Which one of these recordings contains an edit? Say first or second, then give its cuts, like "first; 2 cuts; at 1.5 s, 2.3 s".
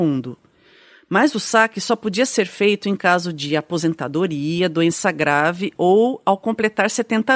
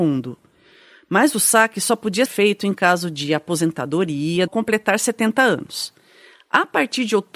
second; 2 cuts; at 2.3 s, 4.5 s